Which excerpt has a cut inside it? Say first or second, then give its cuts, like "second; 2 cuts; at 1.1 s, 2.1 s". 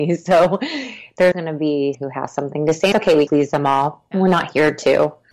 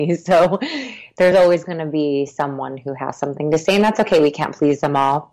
first; 4 cuts; at 1.3 s, 1.9 s, 2.9 s, 3.3 s